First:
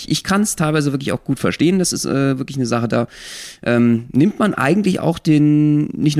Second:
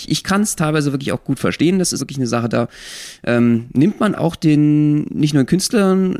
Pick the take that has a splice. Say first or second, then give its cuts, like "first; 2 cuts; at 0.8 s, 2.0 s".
second; 2 cuts; at 2.0 s, 4.1 s